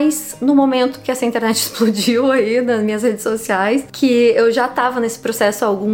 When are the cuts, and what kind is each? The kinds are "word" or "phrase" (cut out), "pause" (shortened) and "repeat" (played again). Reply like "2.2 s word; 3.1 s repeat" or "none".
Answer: none